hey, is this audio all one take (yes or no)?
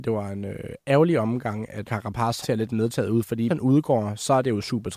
no